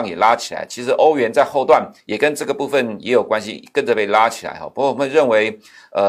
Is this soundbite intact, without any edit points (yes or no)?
no